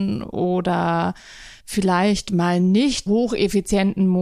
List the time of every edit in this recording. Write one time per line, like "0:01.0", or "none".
0:01.6
0:03.1

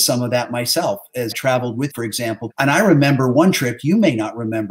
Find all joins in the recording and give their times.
0:01.3
0:01.9
0:02.5

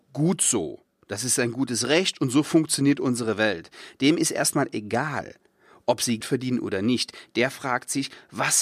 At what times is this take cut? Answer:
0:06.2

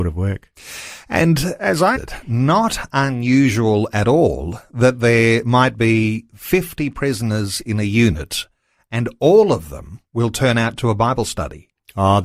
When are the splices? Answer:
0:02.0

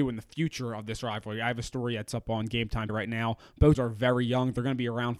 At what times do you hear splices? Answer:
0:02.9
0:03.7

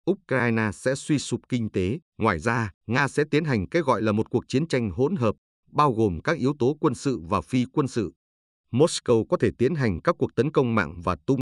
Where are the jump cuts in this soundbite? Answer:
0:02.1
0:02.8

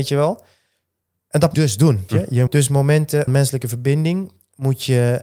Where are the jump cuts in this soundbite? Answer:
0:01.5
0:02.1
0:02.5
0:03.3

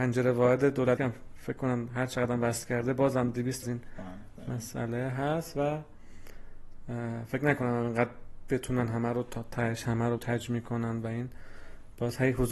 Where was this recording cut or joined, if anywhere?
0:01.0
0:03.6
0:10.2

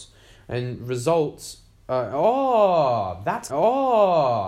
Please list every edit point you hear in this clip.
0:03.5

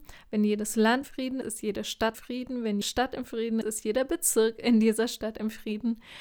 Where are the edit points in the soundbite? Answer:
0:01.0
0:01.4
0:02.1
0:02.8
0:03.6

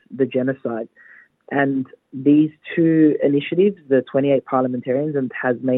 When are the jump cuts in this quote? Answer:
none

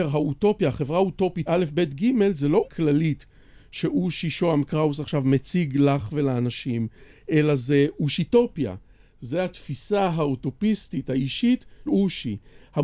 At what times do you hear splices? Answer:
0:01.5
0:02.6
0:11.9

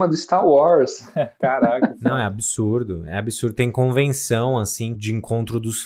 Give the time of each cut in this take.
0:05.0

